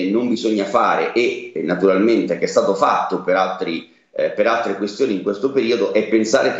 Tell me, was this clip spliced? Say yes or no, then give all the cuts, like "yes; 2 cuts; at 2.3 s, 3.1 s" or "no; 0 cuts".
no; 0 cuts